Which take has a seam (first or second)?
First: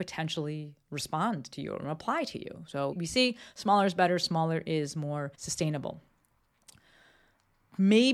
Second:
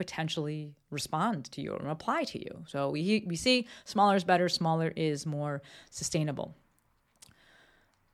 first